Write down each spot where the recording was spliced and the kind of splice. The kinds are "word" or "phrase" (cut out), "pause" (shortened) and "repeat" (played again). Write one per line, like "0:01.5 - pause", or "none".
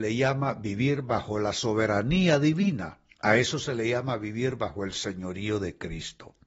0:03.1 - pause